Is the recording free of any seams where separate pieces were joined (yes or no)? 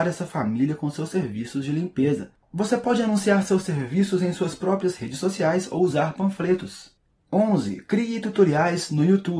yes